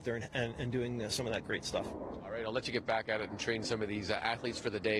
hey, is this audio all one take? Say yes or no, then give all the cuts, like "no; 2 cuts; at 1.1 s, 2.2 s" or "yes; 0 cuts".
yes; 0 cuts